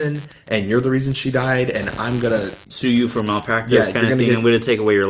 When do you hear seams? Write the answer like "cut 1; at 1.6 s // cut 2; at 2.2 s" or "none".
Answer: cut 1; at 2.6 s